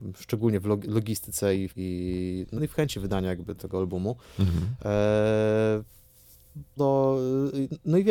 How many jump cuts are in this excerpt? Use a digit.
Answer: 4